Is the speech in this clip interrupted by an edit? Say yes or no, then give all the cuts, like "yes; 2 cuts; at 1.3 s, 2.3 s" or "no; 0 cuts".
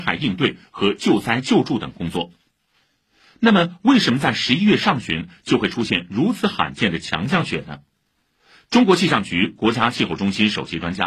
no; 0 cuts